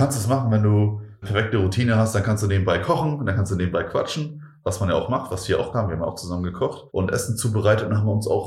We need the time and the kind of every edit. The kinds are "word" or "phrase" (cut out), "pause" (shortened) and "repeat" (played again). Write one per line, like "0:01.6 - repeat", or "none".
0:01.2 - word
0:05.7 - word
0:06.9 - pause

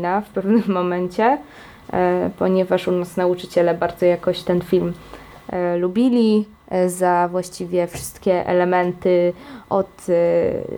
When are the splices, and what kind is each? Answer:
none

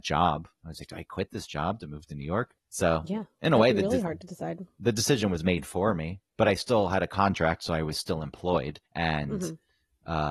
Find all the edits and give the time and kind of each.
0:02.6 - pause
0:08.9 - pause

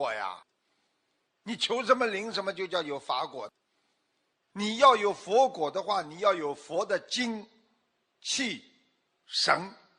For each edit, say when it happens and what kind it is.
none

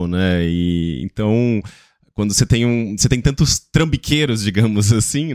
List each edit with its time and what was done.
none

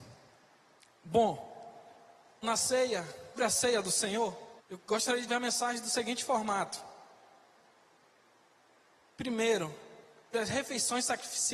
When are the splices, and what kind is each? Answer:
0:02.4 - word
0:03.4 - word
0:04.6 - pause
0:05.3 - word
0:10.3 - word

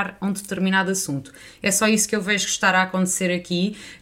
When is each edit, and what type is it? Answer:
none

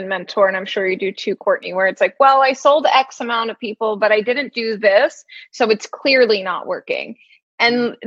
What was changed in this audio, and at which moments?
none

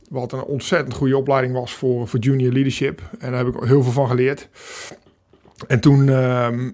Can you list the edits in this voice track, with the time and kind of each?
none

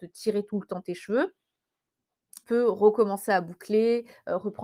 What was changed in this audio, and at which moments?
0:02.4 - phrase

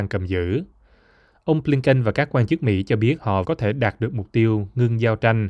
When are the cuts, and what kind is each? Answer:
0:03.4 - phrase

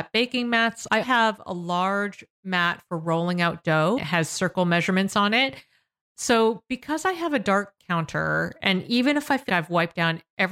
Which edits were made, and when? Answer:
0:01.0 - word
0:04.0 - word
0:07.8 - word
0:09.5 - word

